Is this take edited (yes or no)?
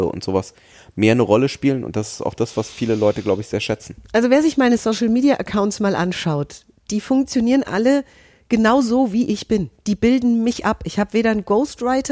no